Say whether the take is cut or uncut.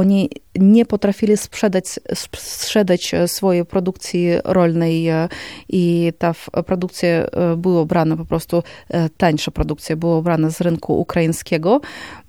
uncut